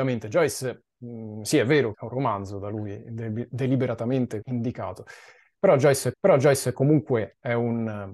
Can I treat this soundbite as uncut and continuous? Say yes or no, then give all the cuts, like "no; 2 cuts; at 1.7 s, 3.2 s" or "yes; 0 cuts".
no; 3 cuts; at 1.9 s, 4.4 s, 6.1 s